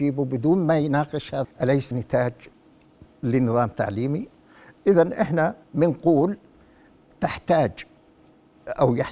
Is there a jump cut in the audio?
yes; 3 cuts; at 1.4 s, 1.9 s, 5.6 s

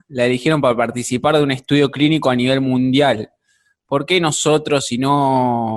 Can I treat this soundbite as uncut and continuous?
yes; 0 cuts

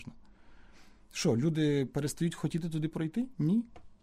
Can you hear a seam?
no; 0 cuts

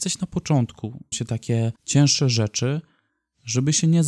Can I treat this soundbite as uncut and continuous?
no; 2 cuts; at 1.1 s, 1.8 s

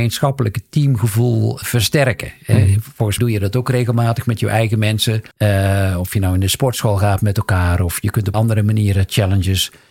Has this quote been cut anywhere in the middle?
yes; 4 cuts; at 1.6 s, 3.2 s, 5.3 s, 8.3 s

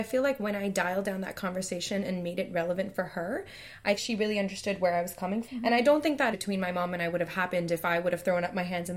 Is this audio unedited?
no; 3 cuts; at 4.0 s, 5.4 s, 6.3 s

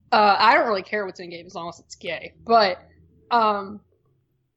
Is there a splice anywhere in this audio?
no; 0 cuts

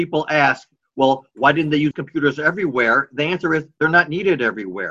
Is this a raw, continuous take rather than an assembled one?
no; 1 cut; at 1.9 s

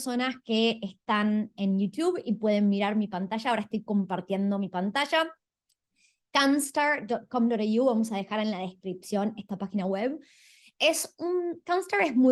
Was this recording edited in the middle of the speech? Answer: no; 0 cuts

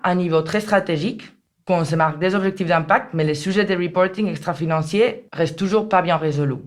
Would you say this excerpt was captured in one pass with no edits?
yes; 0 cuts

